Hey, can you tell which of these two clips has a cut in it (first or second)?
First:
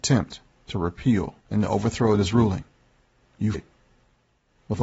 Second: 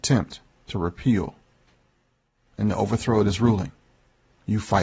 first